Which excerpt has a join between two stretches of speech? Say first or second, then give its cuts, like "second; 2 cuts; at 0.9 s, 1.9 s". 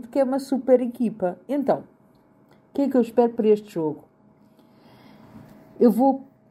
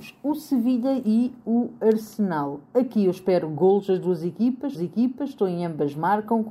second; 1 cut; at 4.7 s